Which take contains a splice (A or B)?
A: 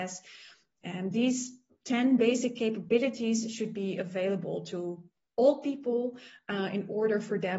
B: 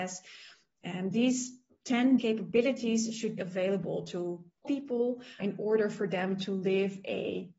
B